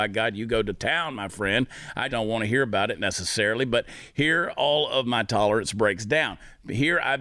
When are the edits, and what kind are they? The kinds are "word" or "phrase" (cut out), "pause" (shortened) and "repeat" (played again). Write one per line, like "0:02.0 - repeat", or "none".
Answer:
0:02.1 - word